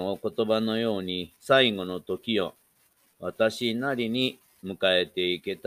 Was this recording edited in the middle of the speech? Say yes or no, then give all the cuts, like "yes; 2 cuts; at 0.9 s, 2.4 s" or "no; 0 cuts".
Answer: yes; 1 cut; at 1.4 s